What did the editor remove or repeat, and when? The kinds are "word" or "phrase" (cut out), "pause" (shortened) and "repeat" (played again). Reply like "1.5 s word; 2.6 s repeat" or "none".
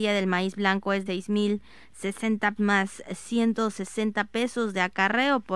1.1 s word; 2.6 s phrase